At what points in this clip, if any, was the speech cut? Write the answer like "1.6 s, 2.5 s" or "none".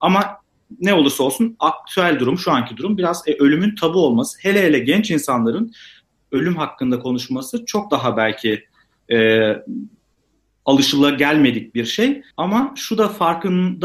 12.3 s